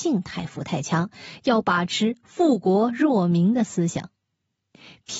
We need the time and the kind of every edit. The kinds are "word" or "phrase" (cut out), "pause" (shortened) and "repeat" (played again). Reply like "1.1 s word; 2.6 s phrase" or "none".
none